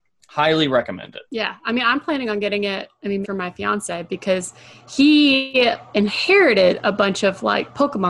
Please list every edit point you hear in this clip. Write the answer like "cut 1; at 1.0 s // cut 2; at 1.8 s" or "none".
cut 1; at 1.3 s // cut 2; at 3.2 s